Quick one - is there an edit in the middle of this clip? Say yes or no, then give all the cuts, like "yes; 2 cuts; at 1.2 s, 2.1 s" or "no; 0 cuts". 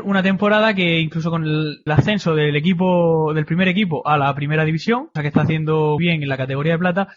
yes; 3 cuts; at 1.9 s, 5.2 s, 6.0 s